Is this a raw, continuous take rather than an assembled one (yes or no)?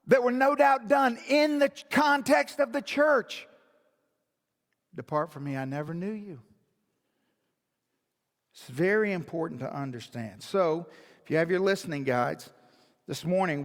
yes